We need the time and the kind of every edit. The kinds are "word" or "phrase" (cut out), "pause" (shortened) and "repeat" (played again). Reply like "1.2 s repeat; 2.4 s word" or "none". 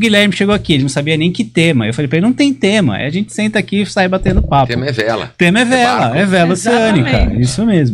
none